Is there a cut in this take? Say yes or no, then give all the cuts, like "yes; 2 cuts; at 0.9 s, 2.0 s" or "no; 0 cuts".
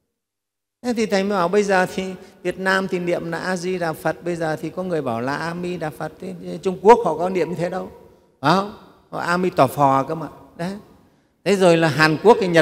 no; 0 cuts